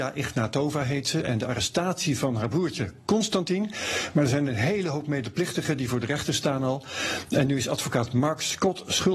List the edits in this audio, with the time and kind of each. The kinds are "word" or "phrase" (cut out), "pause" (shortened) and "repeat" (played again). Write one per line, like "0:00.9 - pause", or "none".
none